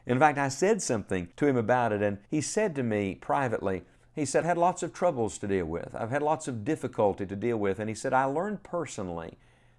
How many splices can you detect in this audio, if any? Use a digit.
3